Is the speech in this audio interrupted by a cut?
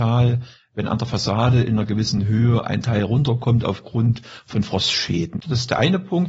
no; 0 cuts

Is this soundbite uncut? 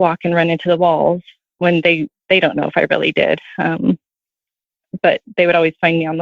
yes; 0 cuts

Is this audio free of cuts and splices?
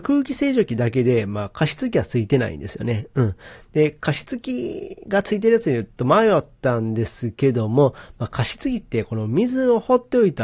yes; 0 cuts

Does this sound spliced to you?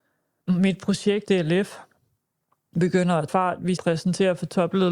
yes; 3 cuts; at 1.2 s, 3.3 s, 3.8 s

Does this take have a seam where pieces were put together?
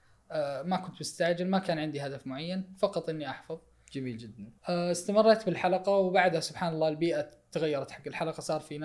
yes; 1 cut; at 4.6 s

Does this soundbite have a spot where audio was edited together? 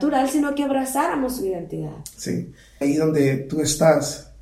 yes; 1 cut; at 2.8 s

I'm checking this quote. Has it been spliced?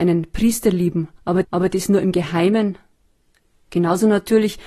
yes; 1 cut; at 1.4 s

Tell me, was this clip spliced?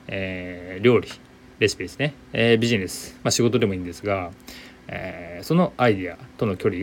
yes; 1 cut; at 2.2 s

